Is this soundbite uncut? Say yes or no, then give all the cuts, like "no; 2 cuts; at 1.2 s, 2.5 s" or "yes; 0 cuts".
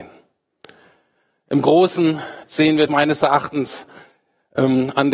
no; 2 cuts; at 2.4 s, 2.9 s